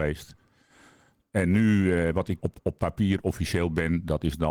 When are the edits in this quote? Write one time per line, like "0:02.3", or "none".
0:02.4